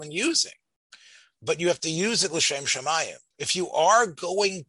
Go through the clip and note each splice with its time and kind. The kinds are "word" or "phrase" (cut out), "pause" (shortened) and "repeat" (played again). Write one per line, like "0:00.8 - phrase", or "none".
0:03.3 - pause